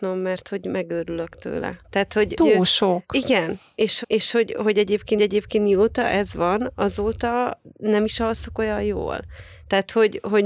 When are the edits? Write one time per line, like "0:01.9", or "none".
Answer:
0:01.8
0:02.4
0:04.0
0:05.2